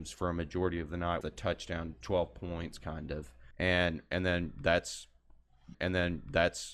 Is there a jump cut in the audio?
yes; 4 cuts; at 1.2 s, 1.9 s, 3.5 s, 5.7 s

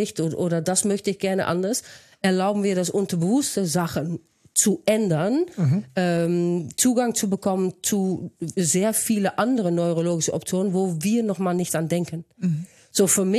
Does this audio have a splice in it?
no; 0 cuts

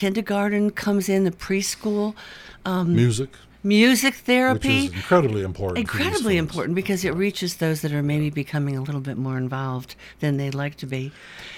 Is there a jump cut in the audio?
no; 0 cuts

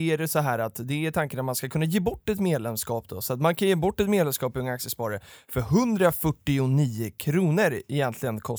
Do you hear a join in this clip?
no; 0 cuts

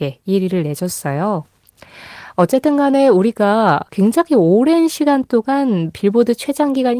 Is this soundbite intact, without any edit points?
no; 1 cut; at 3.9 s

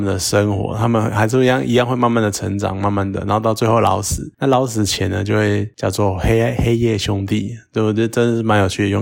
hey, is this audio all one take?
yes; 0 cuts

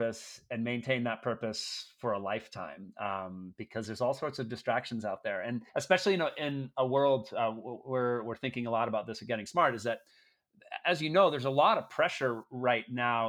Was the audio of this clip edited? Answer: yes; 1 cut; at 5.7 s

